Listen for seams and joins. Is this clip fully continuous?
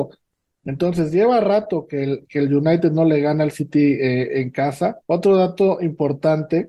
no; 1 cut; at 5.0 s

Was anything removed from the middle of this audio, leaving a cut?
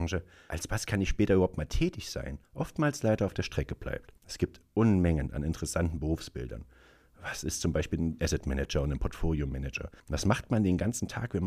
yes; 4 cuts; at 2.4 s, 4.2 s, 8.2 s, 10.0 s

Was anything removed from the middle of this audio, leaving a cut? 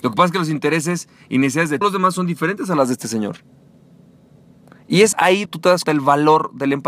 yes; 4 cuts; at 1.8 s, 5.1 s, 5.5 s, 5.8 s

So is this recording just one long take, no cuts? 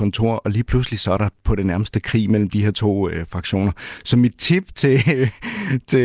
yes; 0 cuts

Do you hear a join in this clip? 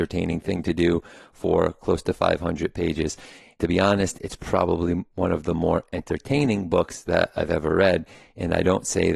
no; 0 cuts

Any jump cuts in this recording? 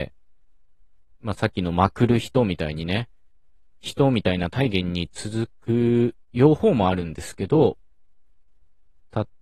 no; 0 cuts

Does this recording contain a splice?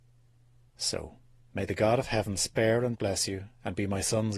no; 0 cuts

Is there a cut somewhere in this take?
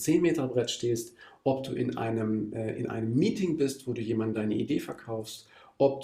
no; 0 cuts

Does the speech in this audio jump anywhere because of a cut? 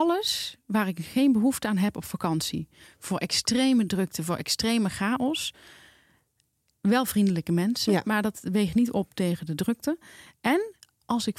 no; 0 cuts

